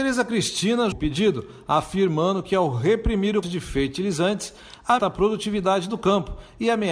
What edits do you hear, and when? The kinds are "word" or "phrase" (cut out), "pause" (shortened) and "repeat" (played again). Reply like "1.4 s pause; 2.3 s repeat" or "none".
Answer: 0.9 s word; 3.4 s word; 5.0 s phrase